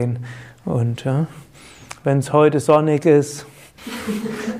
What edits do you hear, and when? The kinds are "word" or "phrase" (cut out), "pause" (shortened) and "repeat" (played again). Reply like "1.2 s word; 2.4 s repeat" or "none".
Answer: none